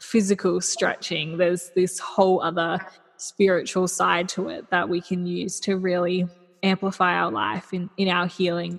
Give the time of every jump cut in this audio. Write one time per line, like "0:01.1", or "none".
none